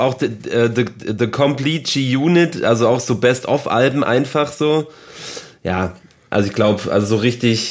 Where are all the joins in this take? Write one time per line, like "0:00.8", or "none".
none